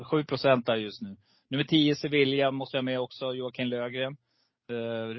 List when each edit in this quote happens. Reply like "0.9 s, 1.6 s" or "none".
none